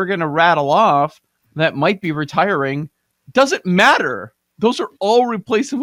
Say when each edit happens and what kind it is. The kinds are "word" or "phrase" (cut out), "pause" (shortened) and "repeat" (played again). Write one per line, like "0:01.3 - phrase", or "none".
none

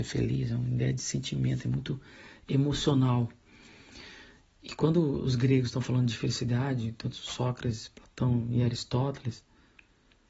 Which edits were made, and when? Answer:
none

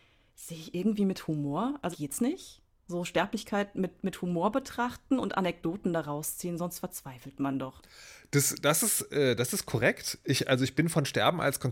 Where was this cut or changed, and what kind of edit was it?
0:01.9 - phrase

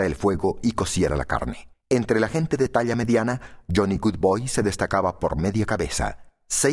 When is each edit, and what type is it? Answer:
0:01.7 - pause

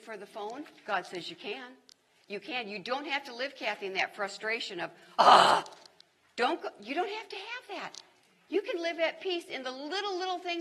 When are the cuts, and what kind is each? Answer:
none

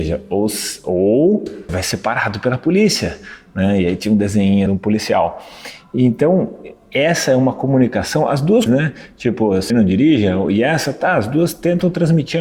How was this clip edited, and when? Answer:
0:01.7 - word
0:04.7 - word
0:08.7 - word
0:09.7 - word

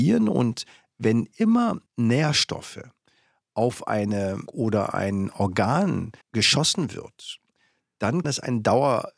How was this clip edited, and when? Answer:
0:01.9 - pause
0:04.5 - word
0:06.2 - pause
0:08.2 - word

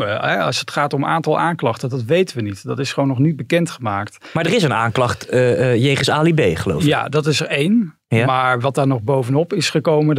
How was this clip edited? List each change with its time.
none

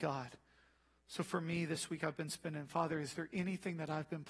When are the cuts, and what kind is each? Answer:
none

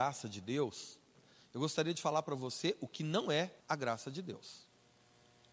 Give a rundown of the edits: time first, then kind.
0:03.6 - pause

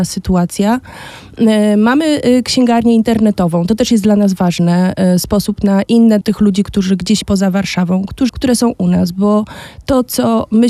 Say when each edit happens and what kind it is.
0:06.2 - phrase
0:07.2 - word
0:08.3 - phrase

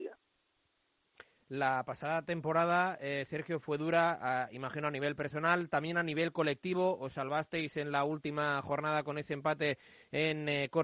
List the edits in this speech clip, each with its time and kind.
0:03.6 - word

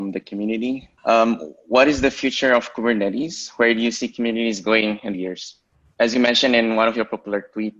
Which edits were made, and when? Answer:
0:01.0 - pause
0:05.1 - phrase

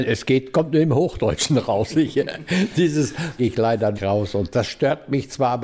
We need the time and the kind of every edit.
0:03.4 - phrase
0:04.0 - phrase
0:04.5 - word

